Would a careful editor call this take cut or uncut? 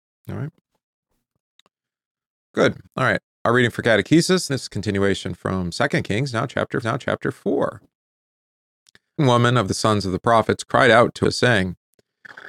cut